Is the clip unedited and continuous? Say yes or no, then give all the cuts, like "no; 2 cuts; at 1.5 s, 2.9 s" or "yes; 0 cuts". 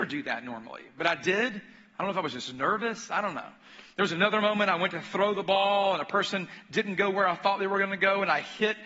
no; 1 cut; at 3.9 s